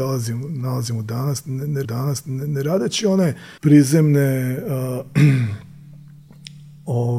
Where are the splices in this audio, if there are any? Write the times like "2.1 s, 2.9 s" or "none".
1.8 s, 3.6 s